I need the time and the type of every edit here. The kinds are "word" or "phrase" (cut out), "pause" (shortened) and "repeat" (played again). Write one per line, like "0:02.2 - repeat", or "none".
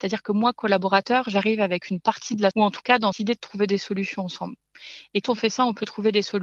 0:02.5 - word
0:03.1 - word
0:05.2 - word